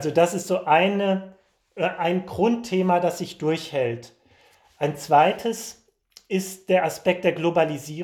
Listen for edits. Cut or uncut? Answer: uncut